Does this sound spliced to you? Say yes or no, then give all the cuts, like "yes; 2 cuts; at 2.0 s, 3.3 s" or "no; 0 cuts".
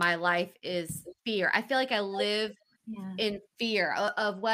yes; 2 cuts; at 1.2 s, 2.7 s